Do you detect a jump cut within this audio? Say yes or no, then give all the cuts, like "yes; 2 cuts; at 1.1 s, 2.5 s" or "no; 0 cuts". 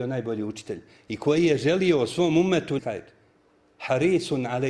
yes; 1 cut; at 2.8 s